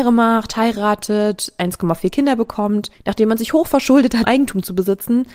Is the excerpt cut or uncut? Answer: cut